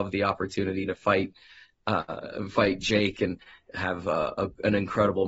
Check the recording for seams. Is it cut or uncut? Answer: uncut